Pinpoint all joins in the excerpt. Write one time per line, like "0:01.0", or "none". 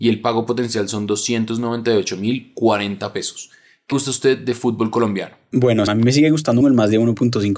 0:03.9
0:05.9
0:06.6